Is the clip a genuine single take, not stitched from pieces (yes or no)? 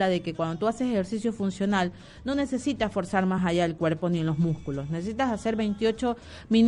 yes